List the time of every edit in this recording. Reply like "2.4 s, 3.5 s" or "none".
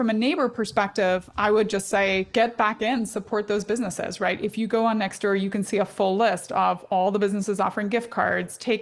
2.3 s